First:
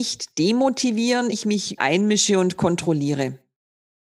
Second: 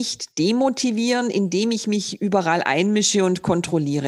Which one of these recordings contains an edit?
first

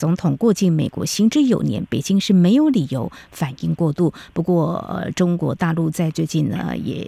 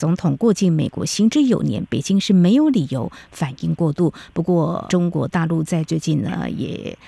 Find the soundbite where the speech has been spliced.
second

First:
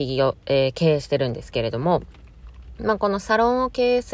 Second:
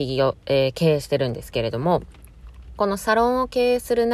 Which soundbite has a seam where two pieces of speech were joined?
second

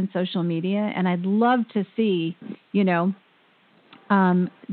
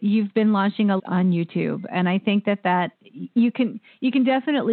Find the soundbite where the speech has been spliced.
second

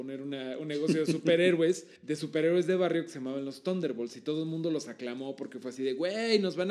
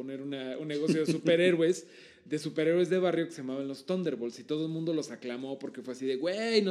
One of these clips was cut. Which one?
first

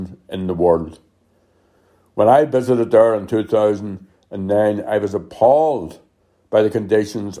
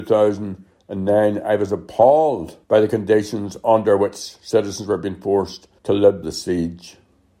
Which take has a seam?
second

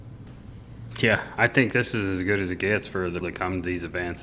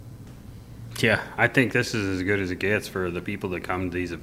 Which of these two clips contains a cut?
first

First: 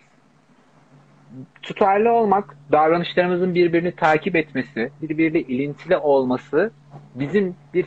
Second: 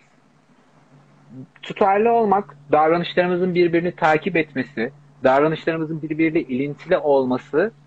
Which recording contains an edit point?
first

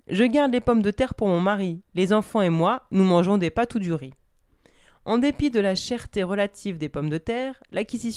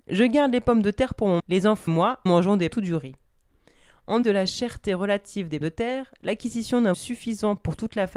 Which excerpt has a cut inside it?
second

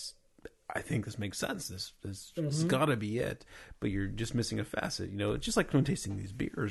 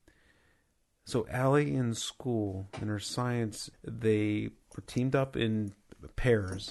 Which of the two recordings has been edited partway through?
second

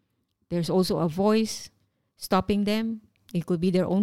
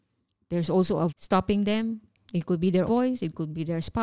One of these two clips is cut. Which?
second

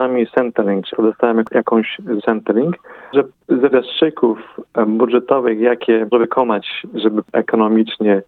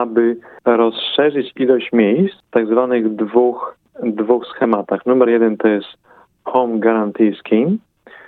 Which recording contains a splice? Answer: first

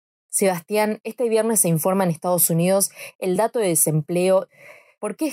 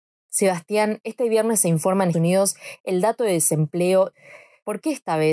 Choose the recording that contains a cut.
second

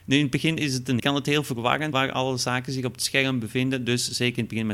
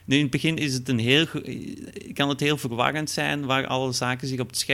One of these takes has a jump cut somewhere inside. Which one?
first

